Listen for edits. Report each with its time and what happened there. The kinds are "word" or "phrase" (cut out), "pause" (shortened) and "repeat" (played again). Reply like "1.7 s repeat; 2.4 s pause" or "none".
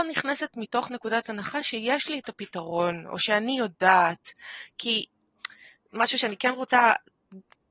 none